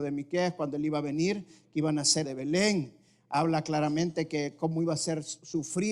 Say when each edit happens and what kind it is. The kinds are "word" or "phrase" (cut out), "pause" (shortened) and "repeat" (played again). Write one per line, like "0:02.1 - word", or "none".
0:02.2 - phrase